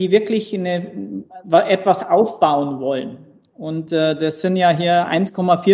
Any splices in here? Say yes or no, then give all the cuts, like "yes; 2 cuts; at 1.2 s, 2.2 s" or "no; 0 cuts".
no; 0 cuts